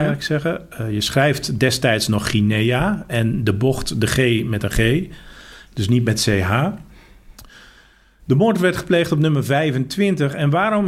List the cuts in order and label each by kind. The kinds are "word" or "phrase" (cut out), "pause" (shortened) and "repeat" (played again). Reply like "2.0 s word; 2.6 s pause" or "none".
none